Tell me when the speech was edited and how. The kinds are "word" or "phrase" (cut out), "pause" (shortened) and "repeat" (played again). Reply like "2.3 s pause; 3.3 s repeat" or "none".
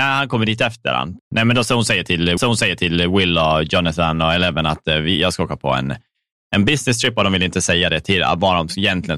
1.2 s pause; 2.4 s repeat